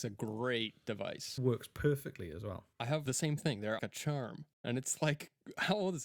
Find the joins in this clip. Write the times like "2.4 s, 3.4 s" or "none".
1.4 s, 2.7 s, 3.1 s, 3.8 s, 4.5 s

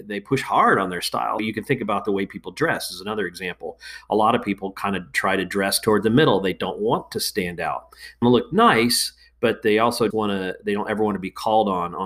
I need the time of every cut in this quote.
1.4 s, 8.2 s, 10.1 s

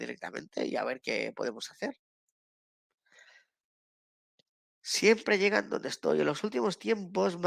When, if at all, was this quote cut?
none

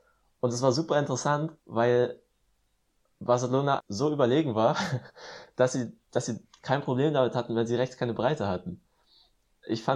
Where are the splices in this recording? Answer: 1.6 s, 3.8 s, 6.0 s

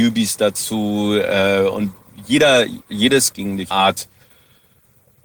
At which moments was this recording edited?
3.3 s, 3.7 s

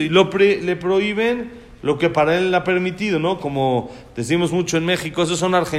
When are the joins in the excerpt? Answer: none

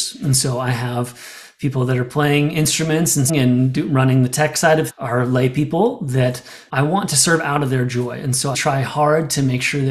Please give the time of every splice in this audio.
3.3 s, 4.9 s, 6.7 s, 8.5 s

